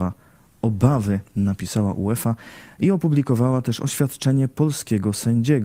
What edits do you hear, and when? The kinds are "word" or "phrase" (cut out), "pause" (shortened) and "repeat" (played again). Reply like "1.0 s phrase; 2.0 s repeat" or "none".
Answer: none